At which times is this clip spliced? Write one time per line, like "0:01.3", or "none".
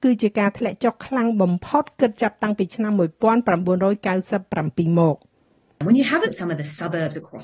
0:06.2